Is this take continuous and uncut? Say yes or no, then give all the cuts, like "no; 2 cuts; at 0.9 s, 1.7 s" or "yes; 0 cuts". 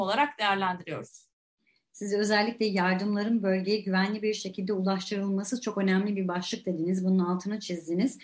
yes; 0 cuts